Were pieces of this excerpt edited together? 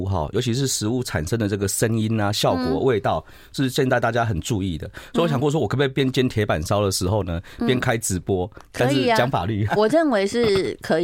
yes; 1 cut; at 9.7 s

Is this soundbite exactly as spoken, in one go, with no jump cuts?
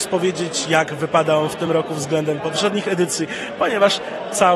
yes; 0 cuts

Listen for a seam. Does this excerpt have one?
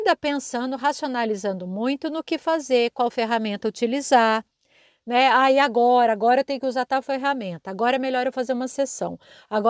no; 0 cuts

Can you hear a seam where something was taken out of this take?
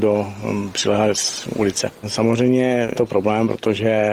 yes; 1 cut; at 2.9 s

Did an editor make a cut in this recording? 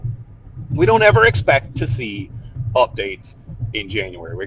no; 0 cuts

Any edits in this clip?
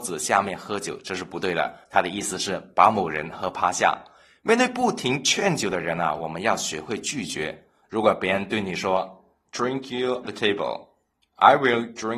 yes; 2 cuts; at 9.4 s, 10.2 s

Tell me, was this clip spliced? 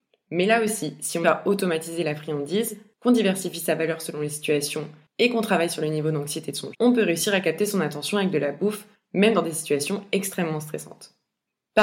yes; 2 cuts; at 1.2 s, 6.7 s

